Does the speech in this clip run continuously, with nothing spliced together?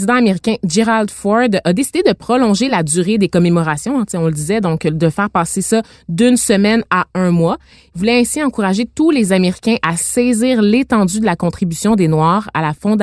yes; 0 cuts

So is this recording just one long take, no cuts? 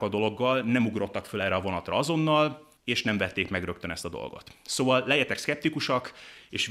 no; 1 cut; at 2.8 s

